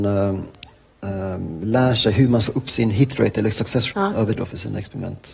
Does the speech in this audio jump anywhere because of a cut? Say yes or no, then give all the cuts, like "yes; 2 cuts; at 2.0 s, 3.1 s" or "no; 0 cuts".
yes; 3 cuts; at 2.4 s, 3.9 s, 4.4 s